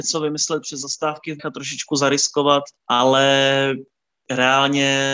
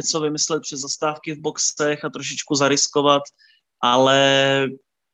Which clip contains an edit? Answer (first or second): first